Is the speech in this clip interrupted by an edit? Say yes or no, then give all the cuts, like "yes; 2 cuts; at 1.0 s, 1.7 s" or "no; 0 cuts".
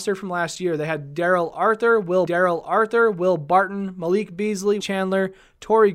yes; 2 cuts; at 2.3 s, 4.8 s